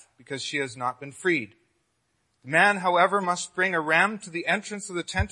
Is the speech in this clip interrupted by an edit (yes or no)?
no